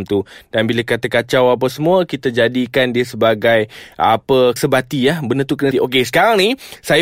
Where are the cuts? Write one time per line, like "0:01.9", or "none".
0:04.6
0:05.7

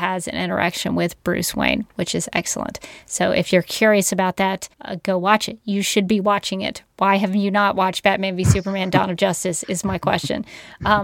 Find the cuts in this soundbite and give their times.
0:04.7

